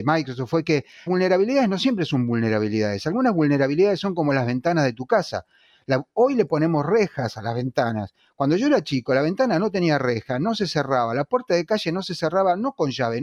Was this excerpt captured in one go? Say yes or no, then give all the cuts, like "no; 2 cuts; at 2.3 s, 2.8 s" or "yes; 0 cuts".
no; 1 cut; at 1.1 s